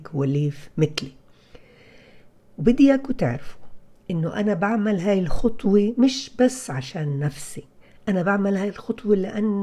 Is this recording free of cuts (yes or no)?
yes